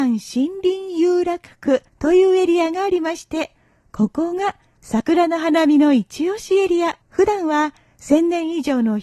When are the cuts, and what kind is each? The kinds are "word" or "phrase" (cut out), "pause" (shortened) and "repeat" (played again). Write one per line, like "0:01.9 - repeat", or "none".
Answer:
0:01.9 - pause
0:07.0 - pause